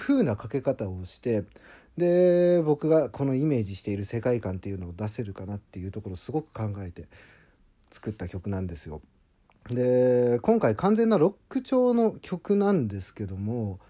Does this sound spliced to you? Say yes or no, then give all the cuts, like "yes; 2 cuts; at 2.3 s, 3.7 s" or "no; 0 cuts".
no; 0 cuts